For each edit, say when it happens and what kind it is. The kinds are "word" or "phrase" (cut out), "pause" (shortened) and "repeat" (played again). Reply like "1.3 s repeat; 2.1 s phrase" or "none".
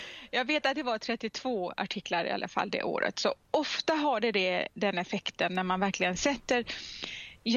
none